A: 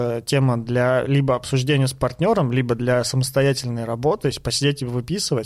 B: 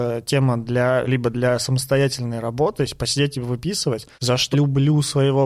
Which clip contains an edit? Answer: B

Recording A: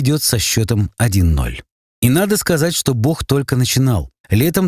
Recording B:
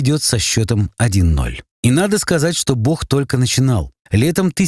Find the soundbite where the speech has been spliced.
B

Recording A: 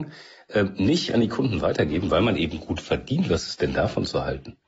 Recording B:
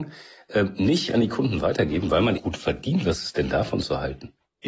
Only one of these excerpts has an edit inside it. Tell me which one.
B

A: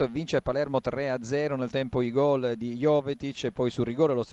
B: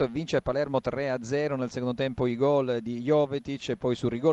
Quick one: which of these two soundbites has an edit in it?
A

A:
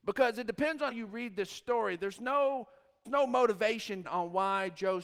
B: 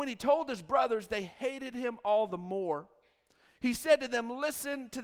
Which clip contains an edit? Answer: A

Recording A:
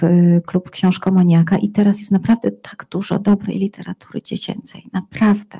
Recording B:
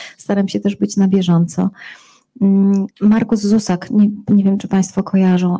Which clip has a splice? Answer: B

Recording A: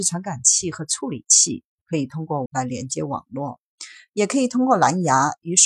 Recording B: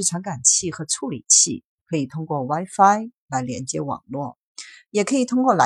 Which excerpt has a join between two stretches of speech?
A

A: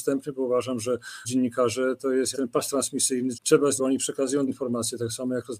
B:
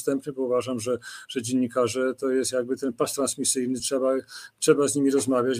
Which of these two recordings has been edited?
A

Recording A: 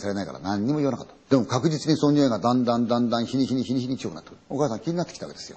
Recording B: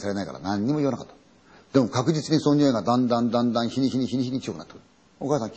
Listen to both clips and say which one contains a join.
A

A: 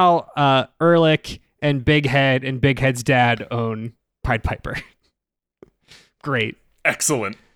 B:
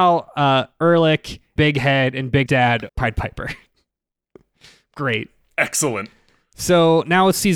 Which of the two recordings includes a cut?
B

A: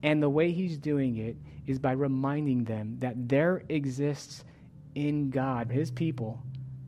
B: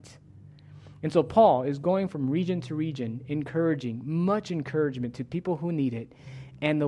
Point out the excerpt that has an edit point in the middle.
A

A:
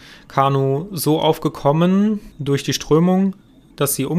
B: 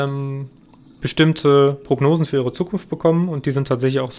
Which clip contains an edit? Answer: A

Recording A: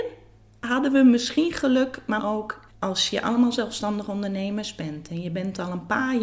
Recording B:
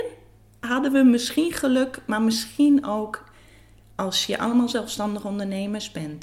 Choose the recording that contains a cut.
A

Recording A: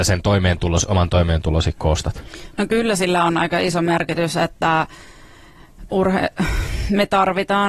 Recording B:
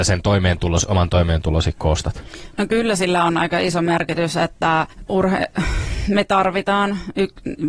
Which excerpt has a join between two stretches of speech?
B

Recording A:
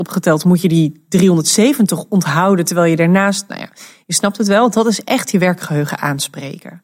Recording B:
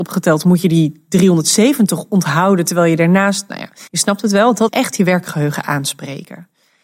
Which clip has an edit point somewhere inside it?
B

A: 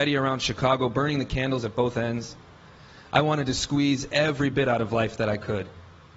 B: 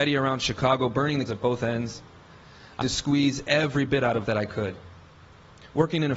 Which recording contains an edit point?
B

